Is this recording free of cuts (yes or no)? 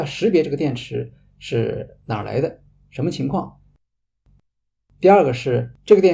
yes